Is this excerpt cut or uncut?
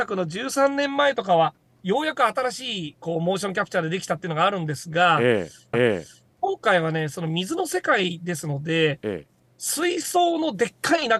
cut